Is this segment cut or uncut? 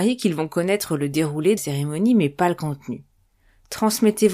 cut